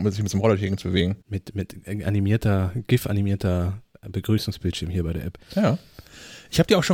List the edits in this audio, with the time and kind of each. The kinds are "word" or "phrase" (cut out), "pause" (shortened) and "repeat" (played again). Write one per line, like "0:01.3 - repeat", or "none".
0:01.2 - pause